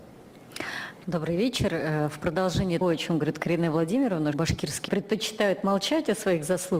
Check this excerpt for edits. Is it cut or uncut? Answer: cut